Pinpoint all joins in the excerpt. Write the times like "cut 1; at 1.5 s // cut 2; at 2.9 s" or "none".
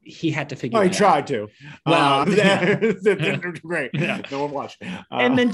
cut 1; at 2.2 s